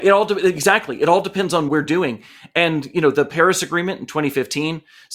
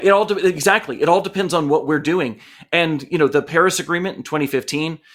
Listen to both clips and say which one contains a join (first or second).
first